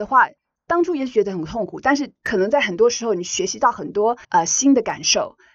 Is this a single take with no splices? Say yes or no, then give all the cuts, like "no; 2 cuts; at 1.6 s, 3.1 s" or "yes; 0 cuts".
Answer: no; 1 cut; at 4.2 s